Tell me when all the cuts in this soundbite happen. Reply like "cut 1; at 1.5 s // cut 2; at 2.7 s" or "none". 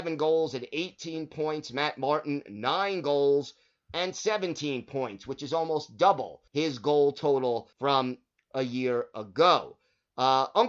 cut 1; at 6.5 s // cut 2; at 7.7 s